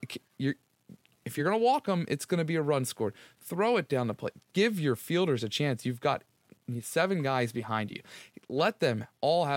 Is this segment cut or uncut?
uncut